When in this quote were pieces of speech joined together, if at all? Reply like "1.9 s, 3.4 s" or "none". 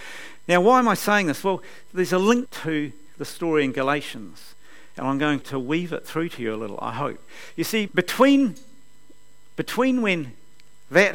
2.5 s, 5.4 s, 7.9 s